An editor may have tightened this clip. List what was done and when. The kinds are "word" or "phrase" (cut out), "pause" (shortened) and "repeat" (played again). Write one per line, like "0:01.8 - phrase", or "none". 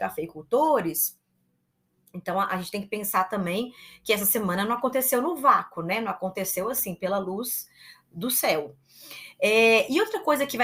none

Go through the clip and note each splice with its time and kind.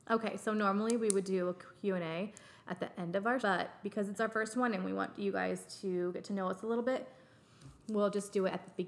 0:03.4 - word
0:07.8 - word

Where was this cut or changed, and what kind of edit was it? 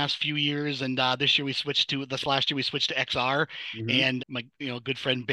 0:04.2 - word

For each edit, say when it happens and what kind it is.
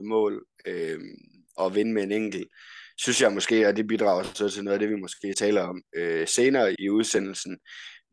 0:01.6 - word
0:05.3 - word
0:06.8 - word

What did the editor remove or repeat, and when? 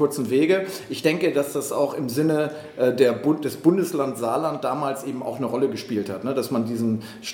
none

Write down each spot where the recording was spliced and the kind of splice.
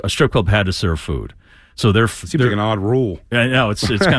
none

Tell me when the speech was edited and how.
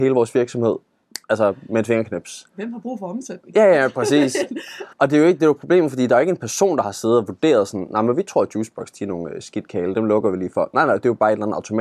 0:01.2 - pause
0:04.9 - pause

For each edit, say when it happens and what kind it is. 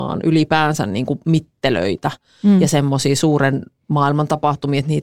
none

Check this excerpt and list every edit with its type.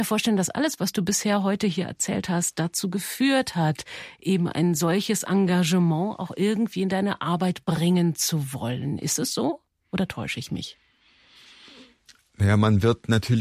none

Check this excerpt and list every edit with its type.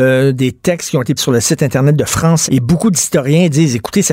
0:01.2 - word
0:02.5 - word

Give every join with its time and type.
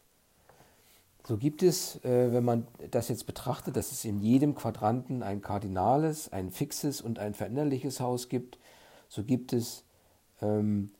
none

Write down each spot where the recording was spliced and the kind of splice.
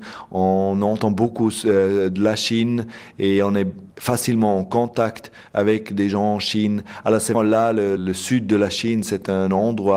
0:03.9 - pause
0:07.3 - word
0:08.0 - word

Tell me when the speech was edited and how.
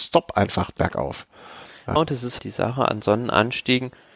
0:02.0 - word
0:02.4 - word

